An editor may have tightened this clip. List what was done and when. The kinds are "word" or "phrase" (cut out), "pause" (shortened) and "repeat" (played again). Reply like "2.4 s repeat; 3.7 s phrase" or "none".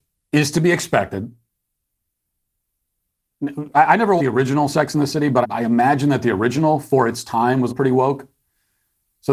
4.2 s word; 5.4 s word; 7.7 s word